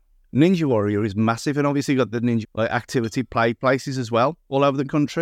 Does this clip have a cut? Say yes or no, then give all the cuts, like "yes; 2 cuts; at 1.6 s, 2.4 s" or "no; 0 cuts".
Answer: yes; 1 cut; at 2.4 s